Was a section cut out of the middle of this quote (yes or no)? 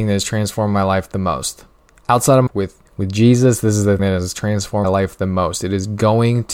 yes